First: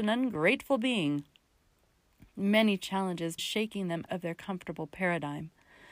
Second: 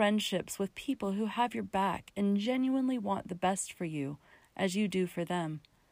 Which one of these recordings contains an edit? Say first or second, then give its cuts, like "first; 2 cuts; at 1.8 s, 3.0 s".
first; 2 cuts; at 3.4 s, 4.1 s